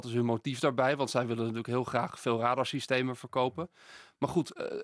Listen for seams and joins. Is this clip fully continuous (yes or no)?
yes